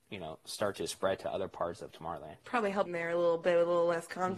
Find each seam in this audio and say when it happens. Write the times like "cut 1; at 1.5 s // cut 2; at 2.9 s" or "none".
cut 1; at 2.4 s // cut 2; at 2.9 s